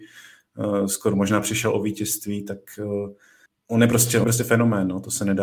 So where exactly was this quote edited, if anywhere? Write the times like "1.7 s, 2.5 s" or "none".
3.5 s, 4.2 s